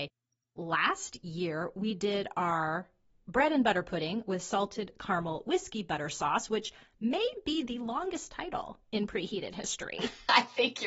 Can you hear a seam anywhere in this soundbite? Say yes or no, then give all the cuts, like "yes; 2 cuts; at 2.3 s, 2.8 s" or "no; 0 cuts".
no; 0 cuts